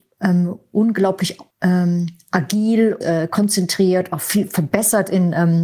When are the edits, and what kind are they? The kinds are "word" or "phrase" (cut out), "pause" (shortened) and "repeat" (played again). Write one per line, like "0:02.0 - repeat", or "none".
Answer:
0:01.5 - pause
0:03.0 - phrase